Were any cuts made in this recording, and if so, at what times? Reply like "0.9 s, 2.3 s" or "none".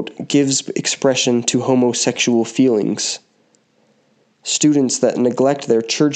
none

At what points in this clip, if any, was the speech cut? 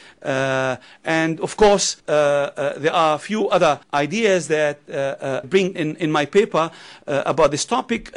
2.0 s, 3.8 s, 5.4 s, 5.7 s

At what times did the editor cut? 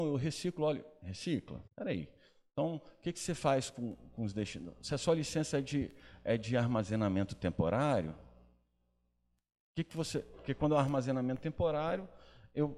1.7 s

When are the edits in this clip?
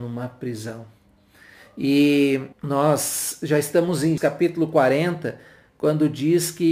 2.5 s, 4.2 s

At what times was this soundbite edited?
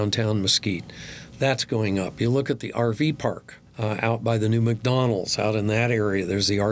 3.7 s

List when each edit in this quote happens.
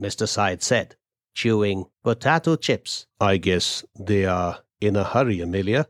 1.9 s, 3.1 s

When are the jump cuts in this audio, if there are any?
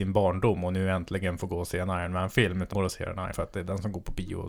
2.7 s, 3.3 s

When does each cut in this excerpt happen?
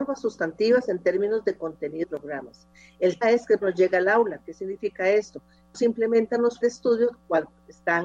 2.0 s, 3.2 s, 3.6 s, 5.7 s, 6.6 s

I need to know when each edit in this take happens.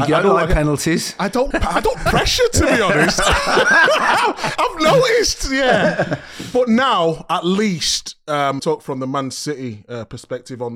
1.5 s, 1.9 s, 8.6 s

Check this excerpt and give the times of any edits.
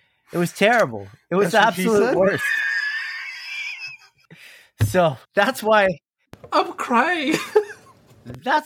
5.2 s

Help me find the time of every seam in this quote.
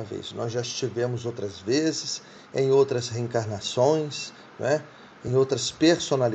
none

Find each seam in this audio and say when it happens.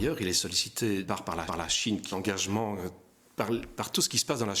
1.0 s, 1.5 s, 2.1 s

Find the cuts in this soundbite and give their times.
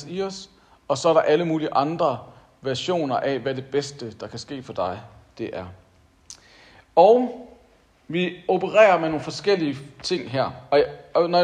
none

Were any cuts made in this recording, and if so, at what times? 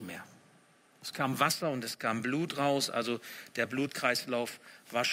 none

